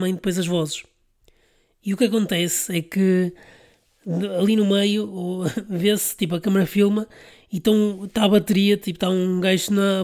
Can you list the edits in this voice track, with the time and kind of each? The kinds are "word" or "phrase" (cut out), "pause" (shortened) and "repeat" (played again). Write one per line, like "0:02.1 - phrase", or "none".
none